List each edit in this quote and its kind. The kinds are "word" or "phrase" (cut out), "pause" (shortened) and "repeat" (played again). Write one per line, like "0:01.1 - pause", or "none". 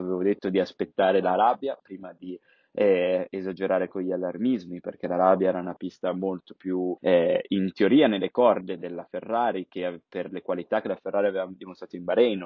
0:07.0 - pause